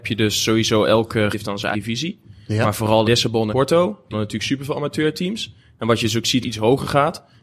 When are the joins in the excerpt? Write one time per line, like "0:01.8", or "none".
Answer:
0:01.3
0:01.7
0:03.0
0:03.5
0:04.1
0:06.4

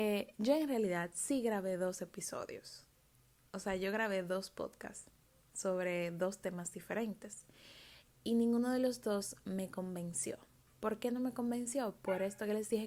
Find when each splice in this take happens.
none

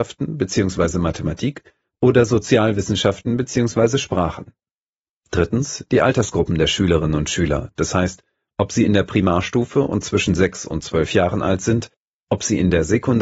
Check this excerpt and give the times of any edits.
none

